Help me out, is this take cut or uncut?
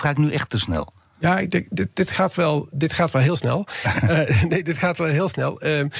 uncut